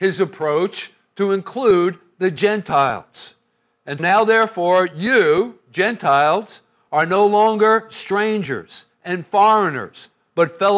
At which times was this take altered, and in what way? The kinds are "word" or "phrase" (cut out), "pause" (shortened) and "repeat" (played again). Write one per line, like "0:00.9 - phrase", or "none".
0:04.0 - word
0:08.9 - pause